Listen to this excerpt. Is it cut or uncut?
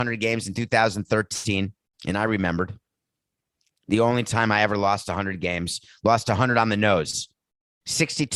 uncut